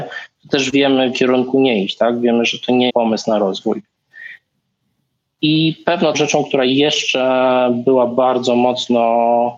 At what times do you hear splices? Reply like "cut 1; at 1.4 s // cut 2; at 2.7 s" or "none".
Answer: cut 1; at 1.1 s // cut 2; at 2.9 s // cut 3; at 6.1 s